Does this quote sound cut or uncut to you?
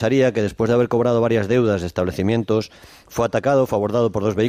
uncut